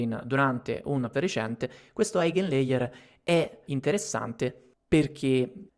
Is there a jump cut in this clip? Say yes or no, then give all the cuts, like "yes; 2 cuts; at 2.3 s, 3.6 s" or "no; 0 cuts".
yes; 2 cuts; at 1.1 s, 3.7 s